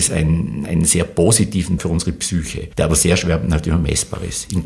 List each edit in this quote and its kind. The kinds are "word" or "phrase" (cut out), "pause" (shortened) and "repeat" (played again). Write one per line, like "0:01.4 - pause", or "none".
0:01.8 - word
0:02.7 - pause